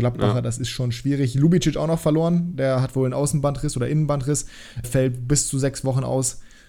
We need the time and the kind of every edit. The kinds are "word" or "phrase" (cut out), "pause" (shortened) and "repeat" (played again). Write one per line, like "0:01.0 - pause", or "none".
0:04.8 - word